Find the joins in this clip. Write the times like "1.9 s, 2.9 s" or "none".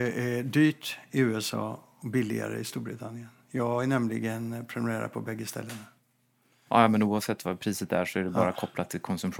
none